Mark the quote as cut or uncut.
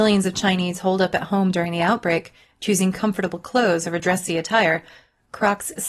uncut